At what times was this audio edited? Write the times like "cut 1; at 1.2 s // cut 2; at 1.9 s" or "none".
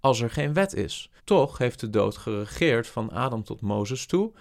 cut 1; at 1.2 s